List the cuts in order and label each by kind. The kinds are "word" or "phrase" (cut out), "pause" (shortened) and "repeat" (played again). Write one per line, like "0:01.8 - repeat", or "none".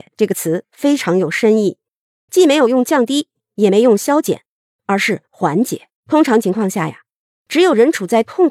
0:06.0 - pause